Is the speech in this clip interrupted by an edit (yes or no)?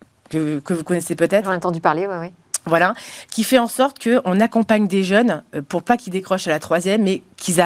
no